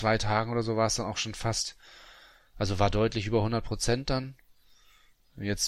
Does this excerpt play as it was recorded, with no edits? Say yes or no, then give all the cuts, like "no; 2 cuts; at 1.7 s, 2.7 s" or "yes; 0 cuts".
yes; 0 cuts